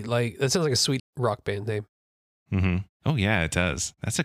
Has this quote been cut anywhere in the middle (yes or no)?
yes